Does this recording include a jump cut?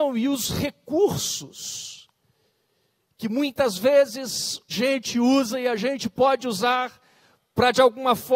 yes; 1 cut; at 4.7 s

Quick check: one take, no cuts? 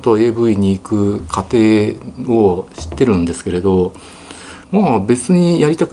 no; 1 cut; at 4.6 s

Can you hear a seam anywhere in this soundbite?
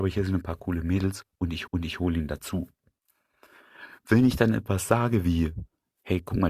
yes; 1 cut; at 1.7 s

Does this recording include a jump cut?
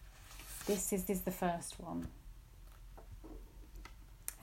yes; 1 cut; at 1.1 s

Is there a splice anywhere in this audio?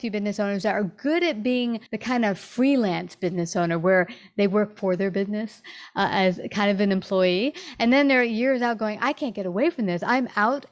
yes; 1 cut; at 1.9 s

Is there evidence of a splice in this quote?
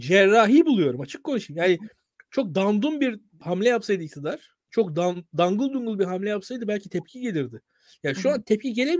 no; 0 cuts

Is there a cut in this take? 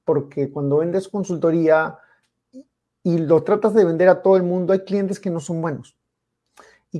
no; 0 cuts

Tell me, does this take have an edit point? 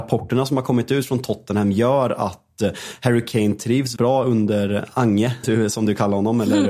yes; 2 cuts; at 4.0 s, 5.4 s

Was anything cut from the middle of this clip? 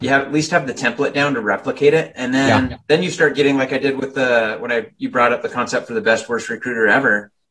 yes; 1 cut; at 2.8 s

